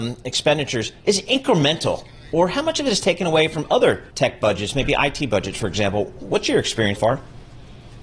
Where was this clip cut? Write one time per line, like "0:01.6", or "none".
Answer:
0:01.0
0:04.1
0:07.0